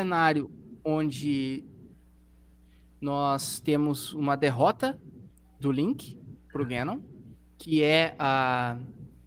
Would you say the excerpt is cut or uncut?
uncut